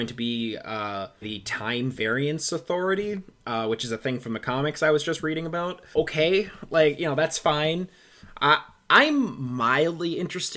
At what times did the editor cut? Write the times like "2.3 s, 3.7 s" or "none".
1.2 s, 5.9 s